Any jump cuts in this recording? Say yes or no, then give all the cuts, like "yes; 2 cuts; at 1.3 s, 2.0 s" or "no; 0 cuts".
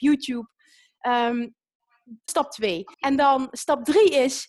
yes; 2 cuts; at 2.3 s, 2.9 s